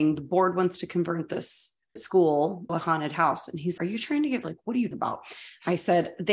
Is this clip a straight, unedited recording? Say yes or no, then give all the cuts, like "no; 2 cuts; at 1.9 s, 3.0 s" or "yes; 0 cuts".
no; 5 cuts; at 2.0 s, 2.7 s, 3.8 s, 4.4 s, 4.9 s